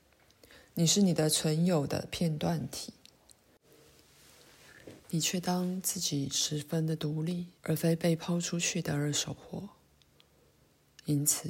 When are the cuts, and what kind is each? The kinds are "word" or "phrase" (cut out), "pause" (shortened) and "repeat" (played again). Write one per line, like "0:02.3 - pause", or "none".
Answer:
0:05.0 - pause
0:07.6 - pause